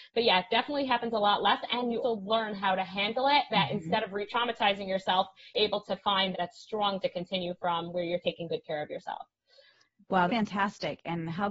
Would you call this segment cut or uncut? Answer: cut